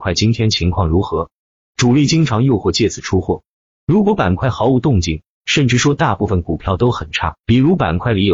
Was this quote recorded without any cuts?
yes; 0 cuts

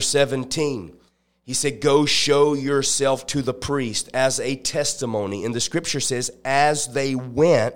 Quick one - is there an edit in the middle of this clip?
no; 0 cuts

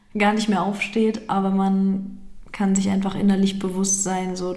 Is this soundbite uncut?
yes; 0 cuts

